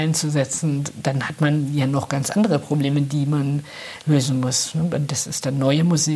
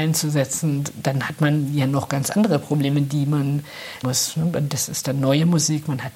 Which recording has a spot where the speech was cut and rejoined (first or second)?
second